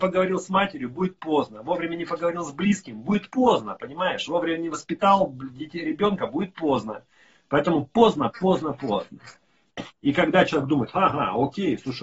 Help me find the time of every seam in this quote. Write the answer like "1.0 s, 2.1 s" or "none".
none